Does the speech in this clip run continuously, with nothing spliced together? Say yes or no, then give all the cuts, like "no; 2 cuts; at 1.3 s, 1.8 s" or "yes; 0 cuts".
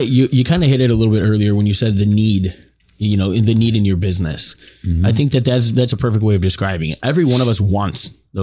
yes; 0 cuts